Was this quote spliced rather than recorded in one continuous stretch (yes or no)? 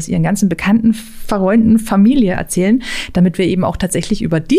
no